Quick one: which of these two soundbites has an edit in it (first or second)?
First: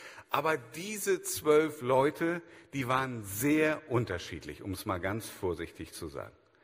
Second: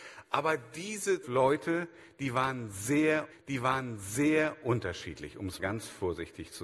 second